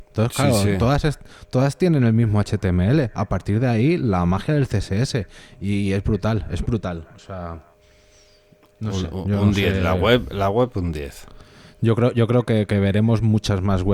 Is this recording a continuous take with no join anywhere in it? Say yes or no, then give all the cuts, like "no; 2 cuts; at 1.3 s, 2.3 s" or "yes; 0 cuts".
yes; 0 cuts